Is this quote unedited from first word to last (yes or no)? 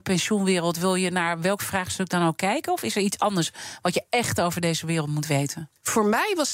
yes